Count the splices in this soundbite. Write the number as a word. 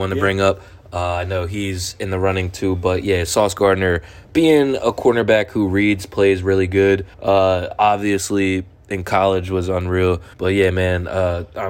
three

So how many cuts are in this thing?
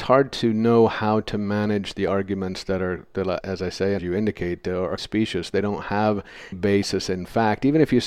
four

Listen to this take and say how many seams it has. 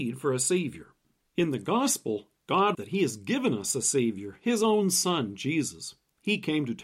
one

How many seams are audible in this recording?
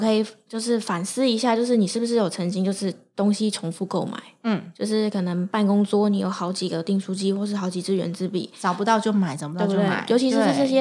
zero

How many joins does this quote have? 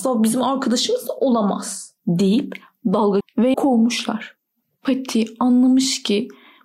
four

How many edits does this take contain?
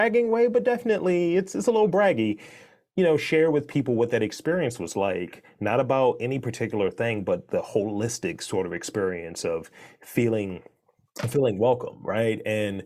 zero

